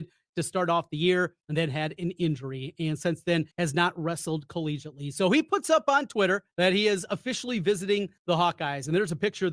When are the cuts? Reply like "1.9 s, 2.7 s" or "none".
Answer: 1.4 s, 3.5 s, 6.5 s, 8.2 s